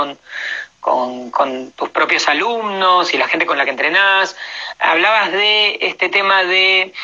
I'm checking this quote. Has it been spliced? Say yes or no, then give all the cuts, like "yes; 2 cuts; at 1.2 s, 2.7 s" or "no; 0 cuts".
no; 0 cuts